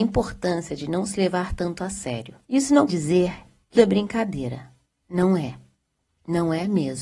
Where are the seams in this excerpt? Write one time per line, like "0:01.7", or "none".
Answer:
0:02.4
0:02.9
0:03.7